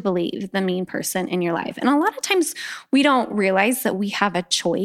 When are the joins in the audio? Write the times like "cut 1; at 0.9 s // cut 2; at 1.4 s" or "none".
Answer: none